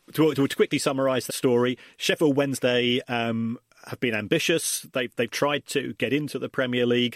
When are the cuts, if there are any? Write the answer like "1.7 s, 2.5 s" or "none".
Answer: 1.3 s